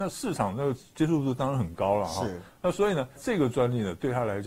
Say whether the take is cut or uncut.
cut